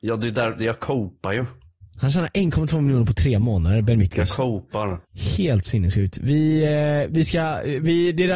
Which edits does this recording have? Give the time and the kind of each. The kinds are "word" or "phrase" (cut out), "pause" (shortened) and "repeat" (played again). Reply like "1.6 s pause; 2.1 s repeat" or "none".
5.0 s pause